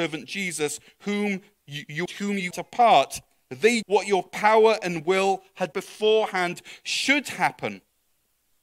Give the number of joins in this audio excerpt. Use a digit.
4